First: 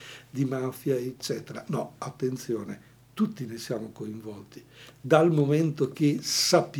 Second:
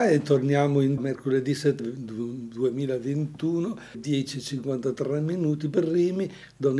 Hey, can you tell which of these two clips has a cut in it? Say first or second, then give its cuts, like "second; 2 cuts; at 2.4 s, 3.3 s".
second; 3 cuts; at 1.0 s, 1.8 s, 3.9 s